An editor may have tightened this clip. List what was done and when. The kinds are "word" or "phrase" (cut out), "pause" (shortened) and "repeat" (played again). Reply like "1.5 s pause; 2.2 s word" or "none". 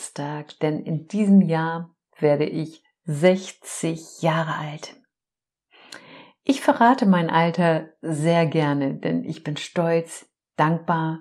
none